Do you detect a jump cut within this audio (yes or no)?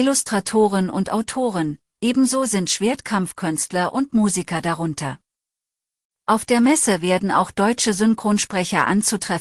no